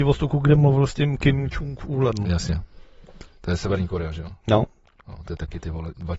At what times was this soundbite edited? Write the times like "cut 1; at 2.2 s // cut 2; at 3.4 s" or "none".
none